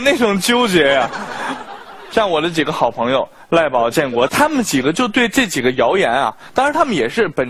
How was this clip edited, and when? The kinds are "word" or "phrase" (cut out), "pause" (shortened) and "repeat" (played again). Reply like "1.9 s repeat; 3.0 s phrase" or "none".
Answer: 4.3 s phrase